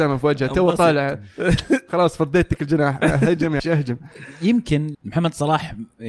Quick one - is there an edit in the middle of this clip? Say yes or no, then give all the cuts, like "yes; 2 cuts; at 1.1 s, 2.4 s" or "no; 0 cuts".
yes; 2 cuts; at 3.6 s, 4.9 s